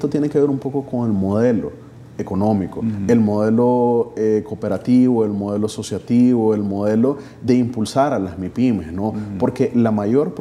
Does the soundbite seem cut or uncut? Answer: uncut